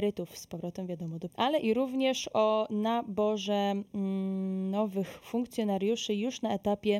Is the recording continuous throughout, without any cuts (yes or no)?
no